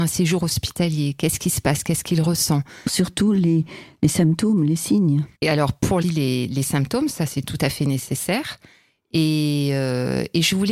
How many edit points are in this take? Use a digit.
3